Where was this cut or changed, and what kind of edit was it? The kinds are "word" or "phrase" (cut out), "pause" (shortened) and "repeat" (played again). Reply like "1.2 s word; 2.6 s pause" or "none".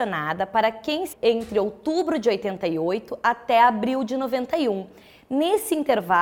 1.1 s word